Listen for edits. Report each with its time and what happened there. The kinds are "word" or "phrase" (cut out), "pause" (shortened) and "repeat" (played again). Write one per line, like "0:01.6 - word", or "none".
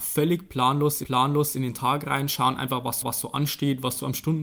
0:01.0 - repeat
0:03.0 - repeat